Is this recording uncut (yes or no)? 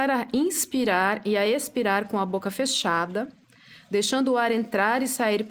yes